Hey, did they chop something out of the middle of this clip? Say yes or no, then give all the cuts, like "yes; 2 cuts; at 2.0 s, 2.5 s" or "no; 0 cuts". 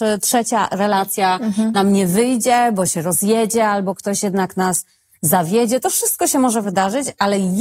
no; 0 cuts